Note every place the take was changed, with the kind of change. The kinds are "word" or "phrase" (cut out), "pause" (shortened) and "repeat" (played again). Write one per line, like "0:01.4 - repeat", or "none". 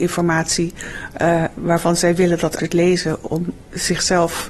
0:02.6 - word